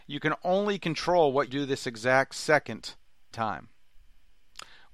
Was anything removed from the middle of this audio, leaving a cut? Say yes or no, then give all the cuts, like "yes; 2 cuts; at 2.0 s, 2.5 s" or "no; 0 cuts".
yes; 2 cuts; at 1.5 s, 3.3 s